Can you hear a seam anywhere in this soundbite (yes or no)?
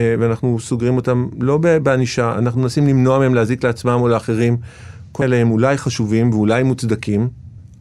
yes